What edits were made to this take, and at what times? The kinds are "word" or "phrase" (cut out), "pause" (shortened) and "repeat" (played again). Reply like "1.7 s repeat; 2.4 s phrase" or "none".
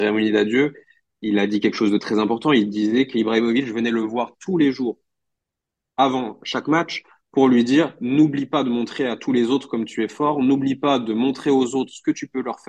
none